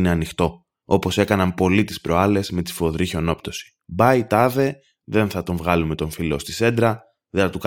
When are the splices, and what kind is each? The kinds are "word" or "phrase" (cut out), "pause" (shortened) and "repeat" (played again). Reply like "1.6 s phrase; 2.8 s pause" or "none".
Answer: none